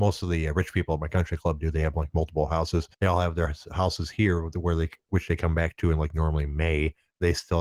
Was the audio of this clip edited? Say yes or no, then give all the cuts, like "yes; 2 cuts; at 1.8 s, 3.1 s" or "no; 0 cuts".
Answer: yes; 1 cut; at 2.9 s